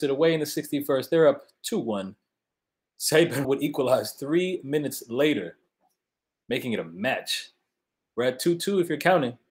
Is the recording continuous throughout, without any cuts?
no; 1 cut; at 3.4 s

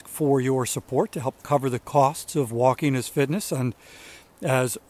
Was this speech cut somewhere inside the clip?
no; 0 cuts

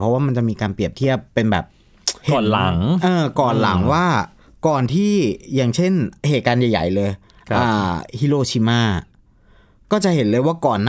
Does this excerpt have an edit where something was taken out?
yes; 3 cuts; at 1.3 s, 2.2 s, 6.2 s

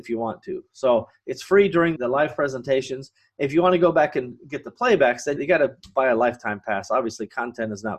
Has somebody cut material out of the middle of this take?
yes; 2 cuts; at 2.0 s, 5.4 s

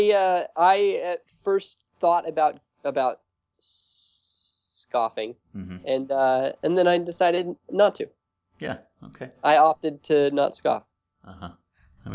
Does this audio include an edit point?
no; 0 cuts

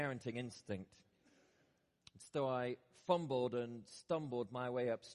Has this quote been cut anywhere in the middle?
no; 0 cuts

